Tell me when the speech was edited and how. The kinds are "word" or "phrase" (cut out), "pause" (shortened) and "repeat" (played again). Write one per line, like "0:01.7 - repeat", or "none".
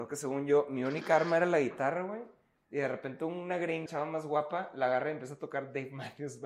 0:03.9 - word